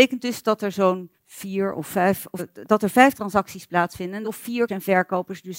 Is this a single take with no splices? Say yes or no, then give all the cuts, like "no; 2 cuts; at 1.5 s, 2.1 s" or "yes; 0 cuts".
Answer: no; 5 cuts; at 1.2 s, 2.4 s, 3.1 s, 4.2 s, 4.7 s